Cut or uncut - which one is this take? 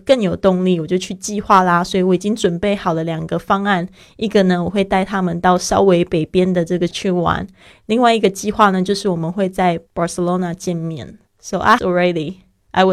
cut